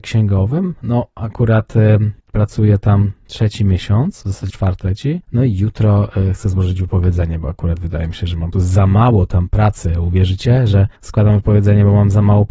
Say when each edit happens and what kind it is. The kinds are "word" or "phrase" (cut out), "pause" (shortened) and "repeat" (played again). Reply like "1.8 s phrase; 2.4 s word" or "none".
2.2 s pause; 4.5 s word; 4.8 s word; 5.2 s pause; 8.5 s word; 11.0 s pause